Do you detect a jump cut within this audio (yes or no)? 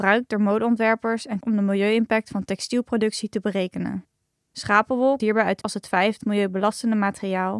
yes